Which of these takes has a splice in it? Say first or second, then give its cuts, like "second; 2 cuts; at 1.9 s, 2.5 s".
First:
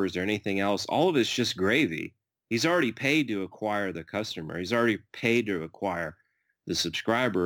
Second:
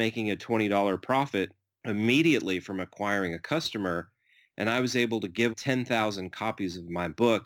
second; 1 cut; at 5.5 s